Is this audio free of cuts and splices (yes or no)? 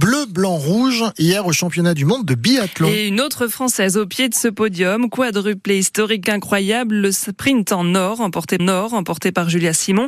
no